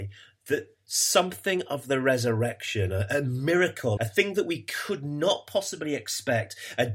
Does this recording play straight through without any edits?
no; 1 cut; at 4.0 s

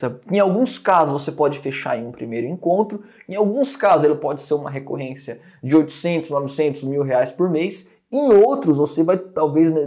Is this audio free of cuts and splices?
yes; 0 cuts

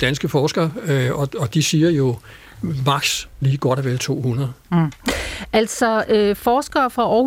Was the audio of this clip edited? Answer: no; 0 cuts

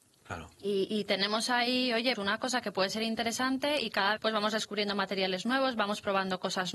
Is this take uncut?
no; 2 cuts; at 2.2 s, 4.2 s

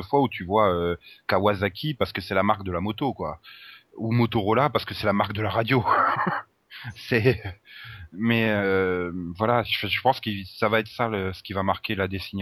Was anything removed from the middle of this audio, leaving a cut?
no; 0 cuts

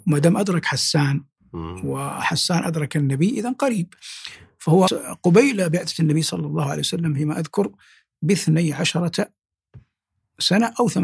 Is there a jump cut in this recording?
yes; 1 cut; at 4.9 s

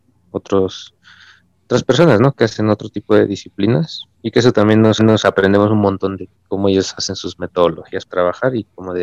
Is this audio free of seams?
no; 4 cuts; at 4.1 s, 5.0 s, 6.3 s, 8.1 s

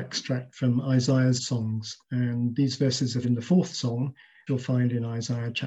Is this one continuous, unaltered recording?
no; 4 cuts; at 1.4 s, 2.0 s, 3.2 s, 4.5 s

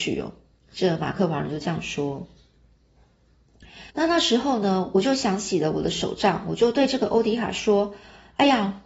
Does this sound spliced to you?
yes; 1 cut; at 3.9 s

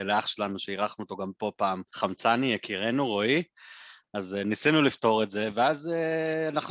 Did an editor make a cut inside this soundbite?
yes; 1 cut; at 1.9 s

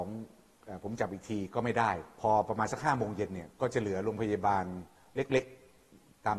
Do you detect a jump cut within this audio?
no; 0 cuts

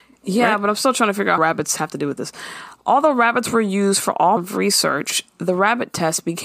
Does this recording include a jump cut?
yes; 2 cuts; at 1.4 s, 4.4 s

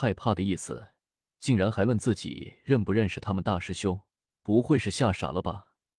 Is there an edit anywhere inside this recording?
yes; 1 cut; at 4.3 s

